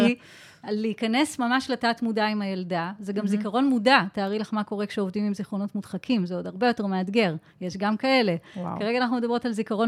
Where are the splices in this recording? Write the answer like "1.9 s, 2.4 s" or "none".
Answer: none